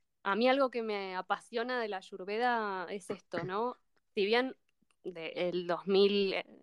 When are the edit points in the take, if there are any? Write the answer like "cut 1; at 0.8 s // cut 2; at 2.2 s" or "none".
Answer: none